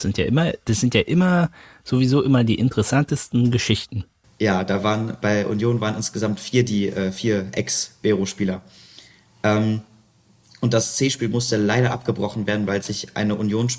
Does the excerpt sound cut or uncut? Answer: uncut